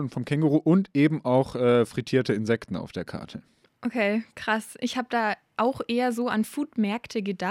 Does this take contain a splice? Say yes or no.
no